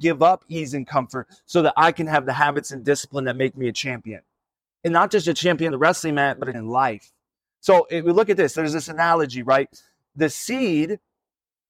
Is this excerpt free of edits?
no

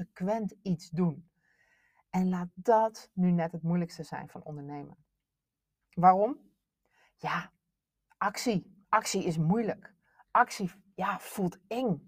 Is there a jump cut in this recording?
no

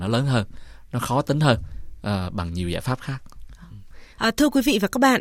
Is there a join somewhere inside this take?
yes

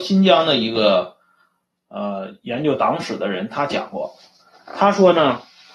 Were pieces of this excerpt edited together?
no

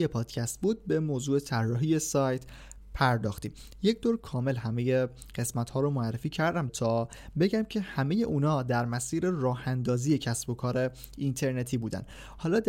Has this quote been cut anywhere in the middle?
yes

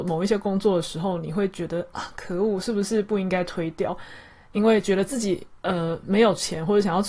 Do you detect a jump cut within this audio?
yes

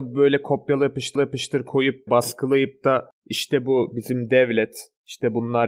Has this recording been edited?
yes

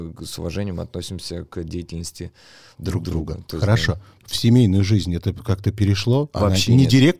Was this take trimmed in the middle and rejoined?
no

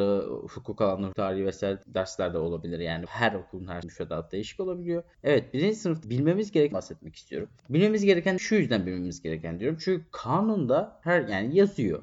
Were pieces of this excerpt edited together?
yes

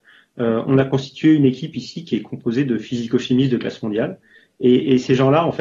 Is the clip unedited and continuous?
yes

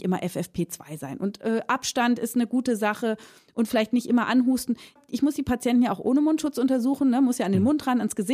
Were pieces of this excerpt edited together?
no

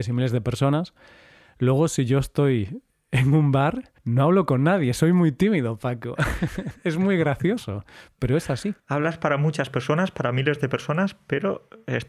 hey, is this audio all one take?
no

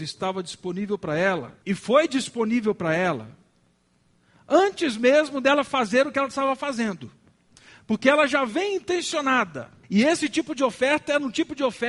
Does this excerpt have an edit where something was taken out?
yes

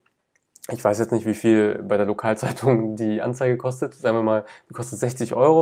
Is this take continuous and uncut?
yes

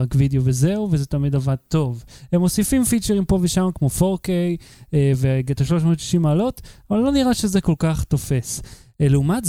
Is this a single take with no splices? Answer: yes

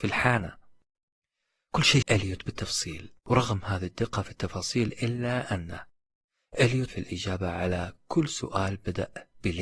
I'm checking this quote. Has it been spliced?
yes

